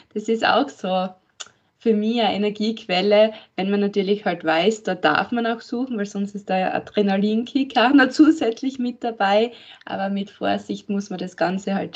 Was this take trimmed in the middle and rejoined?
no; 0 cuts

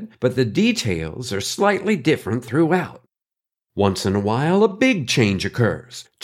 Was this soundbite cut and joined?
no; 0 cuts

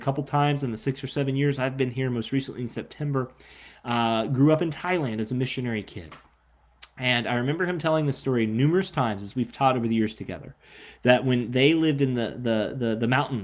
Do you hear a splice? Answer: no; 0 cuts

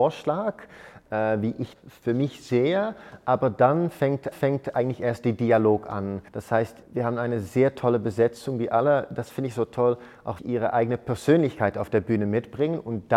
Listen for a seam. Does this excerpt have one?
yes; 5 cuts; at 1.7 s, 4.3 s, 6.3 s, 6.8 s, 10.4 s

